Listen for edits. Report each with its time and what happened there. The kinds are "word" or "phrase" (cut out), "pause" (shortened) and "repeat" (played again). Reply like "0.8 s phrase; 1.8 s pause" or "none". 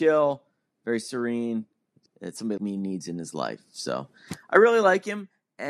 2.1 s phrase; 2.6 s word